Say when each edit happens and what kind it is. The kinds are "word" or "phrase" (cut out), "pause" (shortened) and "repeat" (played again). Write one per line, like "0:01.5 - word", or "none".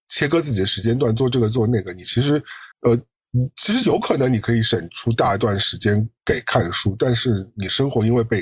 0:02.7 - pause